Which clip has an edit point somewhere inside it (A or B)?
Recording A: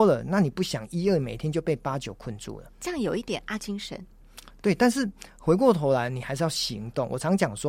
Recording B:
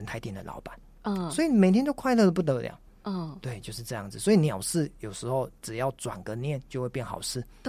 A